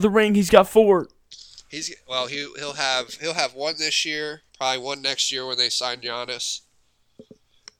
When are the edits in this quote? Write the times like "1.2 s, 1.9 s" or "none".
4.5 s